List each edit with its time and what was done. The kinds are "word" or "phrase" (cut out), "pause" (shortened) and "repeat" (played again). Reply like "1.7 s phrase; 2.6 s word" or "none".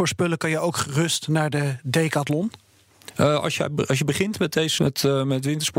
4.8 s word